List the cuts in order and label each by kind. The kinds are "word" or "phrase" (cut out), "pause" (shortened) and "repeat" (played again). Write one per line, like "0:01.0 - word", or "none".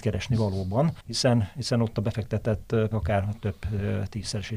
0:01.0 - pause
0:02.9 - word